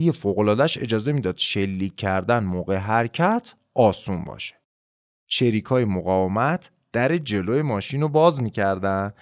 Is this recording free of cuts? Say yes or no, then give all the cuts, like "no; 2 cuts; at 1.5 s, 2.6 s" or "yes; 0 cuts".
yes; 0 cuts